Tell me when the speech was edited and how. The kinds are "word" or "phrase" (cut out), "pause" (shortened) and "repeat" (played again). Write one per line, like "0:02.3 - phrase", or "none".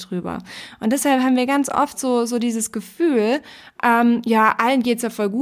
none